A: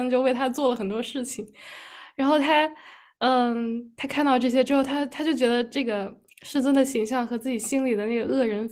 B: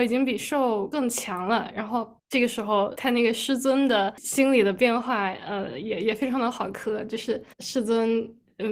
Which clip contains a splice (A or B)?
B